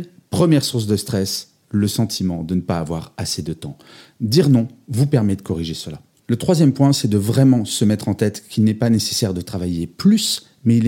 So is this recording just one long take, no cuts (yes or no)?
yes